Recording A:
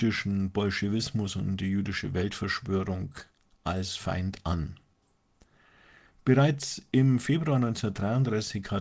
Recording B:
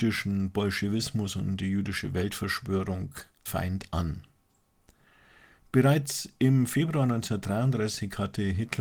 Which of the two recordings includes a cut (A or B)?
B